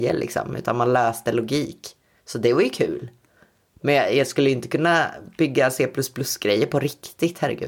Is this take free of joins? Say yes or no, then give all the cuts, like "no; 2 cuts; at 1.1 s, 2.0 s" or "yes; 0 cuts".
yes; 0 cuts